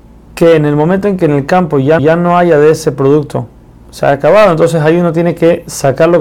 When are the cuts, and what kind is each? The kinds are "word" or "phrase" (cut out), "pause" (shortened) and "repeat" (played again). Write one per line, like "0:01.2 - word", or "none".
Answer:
0:02.0 - repeat